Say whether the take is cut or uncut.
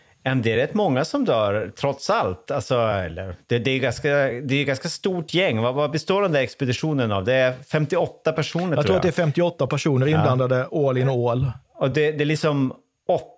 uncut